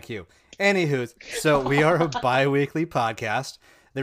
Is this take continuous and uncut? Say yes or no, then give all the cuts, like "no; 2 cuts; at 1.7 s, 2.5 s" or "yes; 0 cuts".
yes; 0 cuts